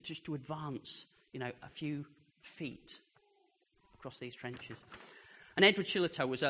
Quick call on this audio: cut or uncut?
uncut